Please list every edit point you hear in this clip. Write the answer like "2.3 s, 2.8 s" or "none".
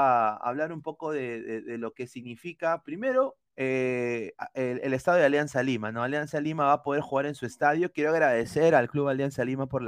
3.5 s

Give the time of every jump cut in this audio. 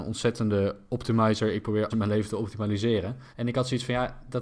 1.9 s, 3.3 s

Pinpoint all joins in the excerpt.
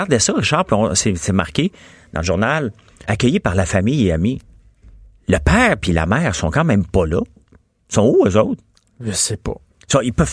3.1 s

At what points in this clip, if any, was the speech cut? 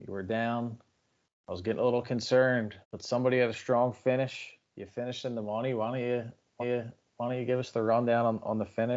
2.8 s, 4.7 s, 6.6 s

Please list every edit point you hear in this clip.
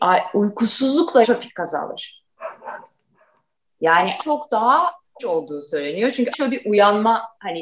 1.2 s, 4.2 s, 5.2 s, 6.3 s

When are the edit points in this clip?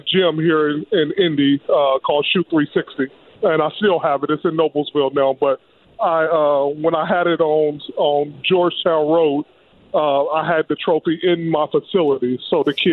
none

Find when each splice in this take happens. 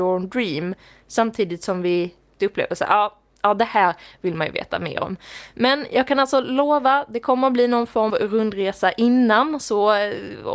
2.4 s, 8.1 s

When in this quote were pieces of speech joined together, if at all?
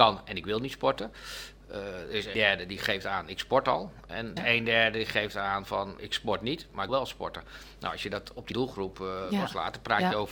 2.3 s, 4.4 s, 6.0 s, 6.9 s, 8.5 s

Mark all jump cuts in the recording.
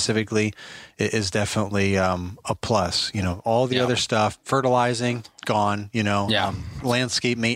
none

